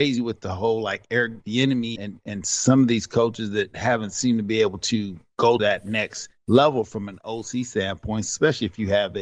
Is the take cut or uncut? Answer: cut